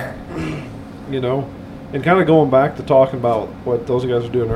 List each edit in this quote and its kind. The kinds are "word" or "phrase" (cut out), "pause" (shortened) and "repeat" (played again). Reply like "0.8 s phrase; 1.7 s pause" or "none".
none

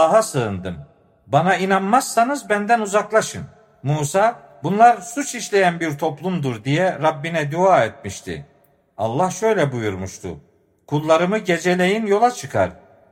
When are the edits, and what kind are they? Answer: none

